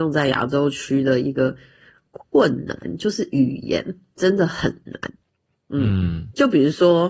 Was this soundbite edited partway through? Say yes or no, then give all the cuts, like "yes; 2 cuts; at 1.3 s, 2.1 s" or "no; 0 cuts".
no; 0 cuts